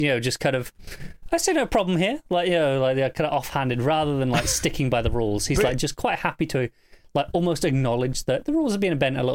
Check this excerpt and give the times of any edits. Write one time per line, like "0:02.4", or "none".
none